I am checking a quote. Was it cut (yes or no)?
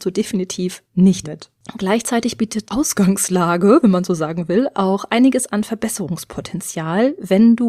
yes